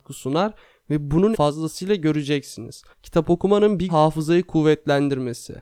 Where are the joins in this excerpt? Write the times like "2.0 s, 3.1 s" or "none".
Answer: 1.3 s, 2.9 s, 3.9 s